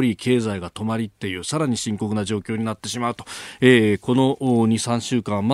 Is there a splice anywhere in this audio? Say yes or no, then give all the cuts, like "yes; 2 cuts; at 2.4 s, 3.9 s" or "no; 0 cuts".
no; 0 cuts